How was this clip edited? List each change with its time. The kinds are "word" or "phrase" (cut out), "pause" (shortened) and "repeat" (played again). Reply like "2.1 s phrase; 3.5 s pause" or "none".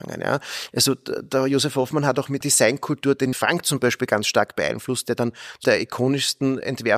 2.4 s word; 3.3 s word; 5.6 s word